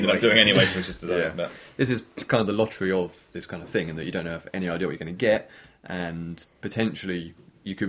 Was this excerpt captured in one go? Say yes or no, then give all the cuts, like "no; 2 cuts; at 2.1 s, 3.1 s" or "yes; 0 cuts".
yes; 0 cuts